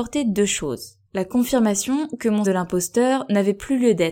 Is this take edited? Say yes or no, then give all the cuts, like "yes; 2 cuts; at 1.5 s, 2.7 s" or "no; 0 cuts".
yes; 2 cuts; at 1.1 s, 2.4 s